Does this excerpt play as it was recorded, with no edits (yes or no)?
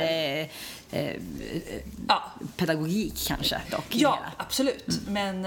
yes